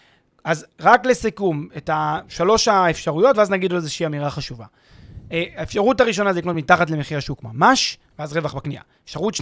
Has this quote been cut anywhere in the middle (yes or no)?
no